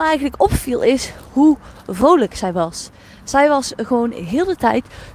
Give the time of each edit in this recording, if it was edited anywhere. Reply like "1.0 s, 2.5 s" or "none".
none